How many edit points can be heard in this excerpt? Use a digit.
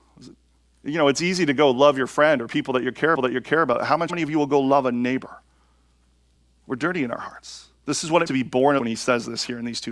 5